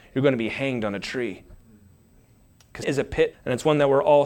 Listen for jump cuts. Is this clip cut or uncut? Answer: cut